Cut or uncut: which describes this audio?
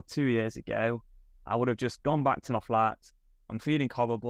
uncut